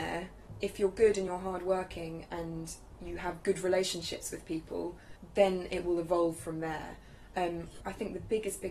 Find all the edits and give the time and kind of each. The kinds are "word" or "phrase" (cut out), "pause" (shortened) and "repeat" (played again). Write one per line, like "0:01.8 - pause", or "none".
none